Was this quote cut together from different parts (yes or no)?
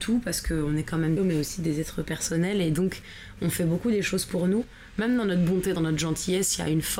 yes